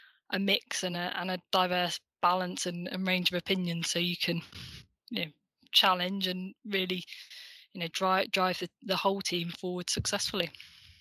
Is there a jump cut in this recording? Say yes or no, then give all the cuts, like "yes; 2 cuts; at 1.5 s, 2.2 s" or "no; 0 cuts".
no; 0 cuts